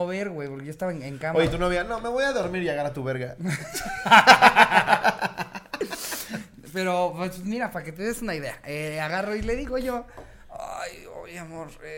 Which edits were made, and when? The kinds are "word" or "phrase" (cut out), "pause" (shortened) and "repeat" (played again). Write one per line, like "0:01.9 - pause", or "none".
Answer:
none